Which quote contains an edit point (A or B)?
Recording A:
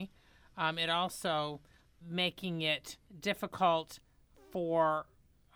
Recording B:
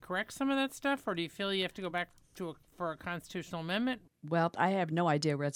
A